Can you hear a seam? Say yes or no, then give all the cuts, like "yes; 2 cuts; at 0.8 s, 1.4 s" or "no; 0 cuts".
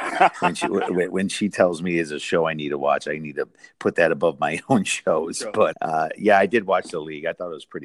yes; 1 cut; at 5.7 s